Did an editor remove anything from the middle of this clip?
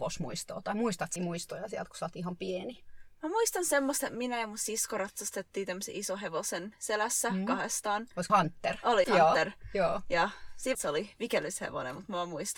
yes; 4 cuts; at 1.2 s, 8.3 s, 9.0 s, 10.7 s

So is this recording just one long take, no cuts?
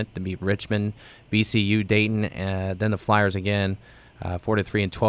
yes; 0 cuts

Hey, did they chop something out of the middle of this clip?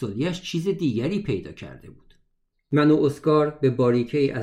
no; 0 cuts

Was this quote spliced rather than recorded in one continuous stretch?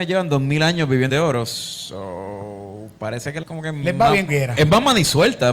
yes; 3 cuts; at 1.1 s, 3.4 s, 4.3 s

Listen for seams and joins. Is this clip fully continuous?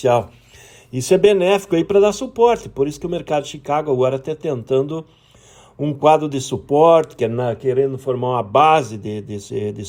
yes; 0 cuts

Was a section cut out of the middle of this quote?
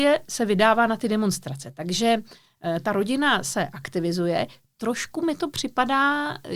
no; 0 cuts

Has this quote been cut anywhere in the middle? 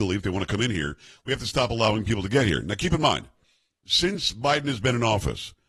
no; 0 cuts

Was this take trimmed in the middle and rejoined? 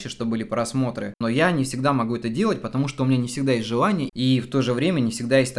no; 0 cuts

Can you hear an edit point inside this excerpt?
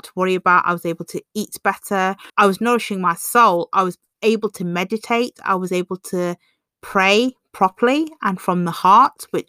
yes; 2 cuts; at 2.3 s, 6.7 s

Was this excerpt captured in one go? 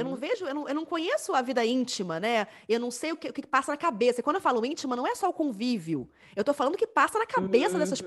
yes; 0 cuts

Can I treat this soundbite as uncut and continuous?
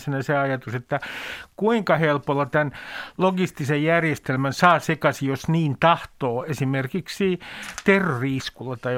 yes; 0 cuts

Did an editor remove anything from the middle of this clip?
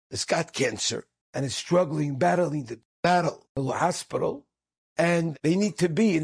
yes; 1 cut; at 1.2 s

